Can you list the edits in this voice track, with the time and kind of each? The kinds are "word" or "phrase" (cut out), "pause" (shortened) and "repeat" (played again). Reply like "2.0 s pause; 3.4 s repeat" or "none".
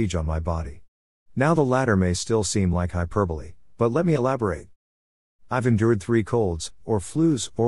none